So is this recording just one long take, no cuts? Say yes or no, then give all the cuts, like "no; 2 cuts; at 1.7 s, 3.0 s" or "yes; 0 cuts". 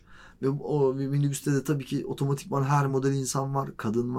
yes; 0 cuts